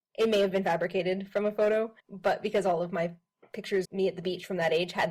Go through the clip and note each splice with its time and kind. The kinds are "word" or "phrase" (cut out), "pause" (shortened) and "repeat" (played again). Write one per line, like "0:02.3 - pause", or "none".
0:02.0 - pause
0:03.8 - word